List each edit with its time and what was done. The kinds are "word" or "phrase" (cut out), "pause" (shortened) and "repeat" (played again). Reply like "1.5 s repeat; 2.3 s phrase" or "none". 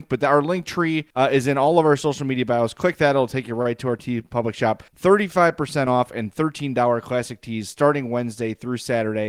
1.1 s pause; 4.9 s pause